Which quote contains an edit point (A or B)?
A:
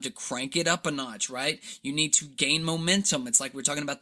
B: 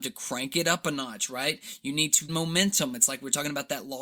B